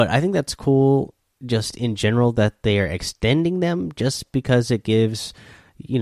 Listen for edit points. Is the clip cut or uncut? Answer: uncut